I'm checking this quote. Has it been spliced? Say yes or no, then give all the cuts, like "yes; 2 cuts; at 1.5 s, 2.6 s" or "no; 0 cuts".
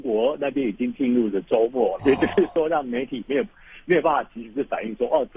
yes; 1 cut; at 2.0 s